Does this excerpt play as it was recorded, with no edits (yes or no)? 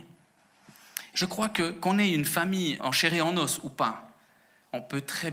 no